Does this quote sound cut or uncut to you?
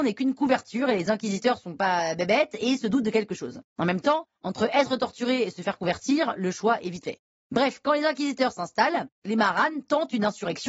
uncut